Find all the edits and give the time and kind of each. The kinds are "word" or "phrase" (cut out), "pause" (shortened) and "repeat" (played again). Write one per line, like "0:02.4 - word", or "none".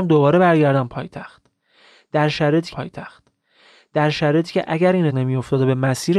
0:02.7 - repeat
0:05.1 - word